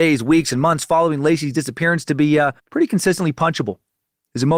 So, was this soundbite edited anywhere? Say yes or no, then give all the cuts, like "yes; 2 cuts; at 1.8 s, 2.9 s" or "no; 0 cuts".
yes; 1 cut; at 2.6 s